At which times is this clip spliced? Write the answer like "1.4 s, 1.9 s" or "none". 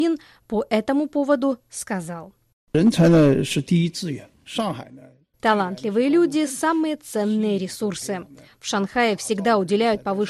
none

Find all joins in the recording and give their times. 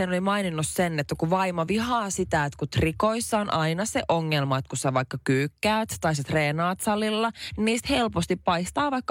none

